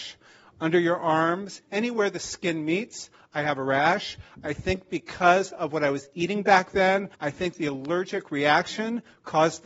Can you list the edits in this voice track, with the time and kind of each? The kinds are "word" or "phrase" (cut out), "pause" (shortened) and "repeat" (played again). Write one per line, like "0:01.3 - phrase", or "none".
0:07.1 - pause

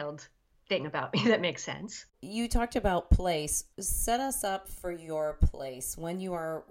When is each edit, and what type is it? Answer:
0:02.1 - pause
0:03.7 - pause

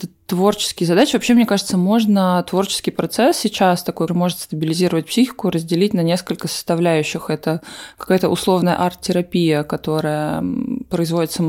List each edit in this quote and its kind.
0:04.1 - word

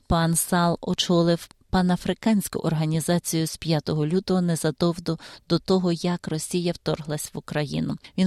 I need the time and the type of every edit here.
none

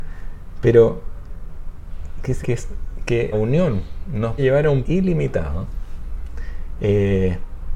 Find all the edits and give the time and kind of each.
0:02.4 - word
0:03.3 - word
0:04.4 - word
0:04.8 - word

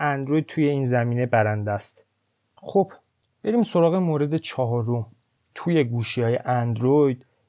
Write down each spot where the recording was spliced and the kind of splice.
none

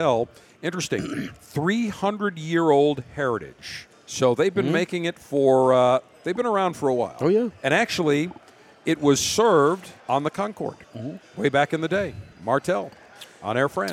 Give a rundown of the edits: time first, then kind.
0:03.9 - pause
0:10.0 - pause
0:10.8 - pause
0:12.3 - pause

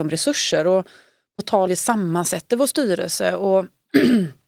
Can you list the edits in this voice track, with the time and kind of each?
0:01.7 - phrase

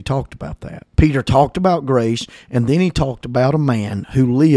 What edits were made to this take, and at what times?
0:00.9 - pause

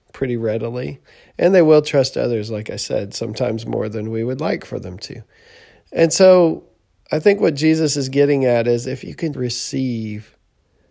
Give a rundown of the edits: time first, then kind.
0:09.3 - word

